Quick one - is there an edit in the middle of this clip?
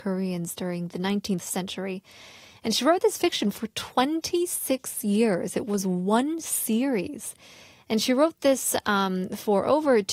no; 0 cuts

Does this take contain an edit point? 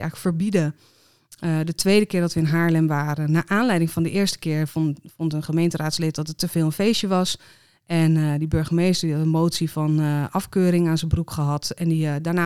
no; 0 cuts

